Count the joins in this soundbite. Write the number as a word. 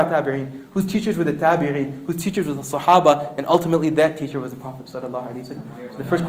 zero